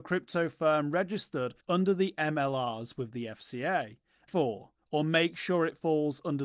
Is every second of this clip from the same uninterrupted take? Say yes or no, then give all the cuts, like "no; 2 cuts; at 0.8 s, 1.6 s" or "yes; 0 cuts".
no; 2 cuts; at 1.6 s, 4.3 s